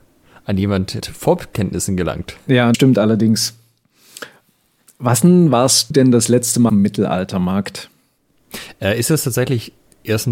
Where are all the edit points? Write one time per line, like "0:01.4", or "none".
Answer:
0:01.0
0:02.7
0:05.9
0:06.7